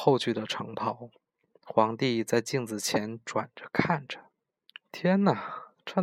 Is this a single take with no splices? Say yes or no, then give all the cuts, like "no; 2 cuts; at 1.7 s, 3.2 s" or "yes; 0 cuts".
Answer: yes; 0 cuts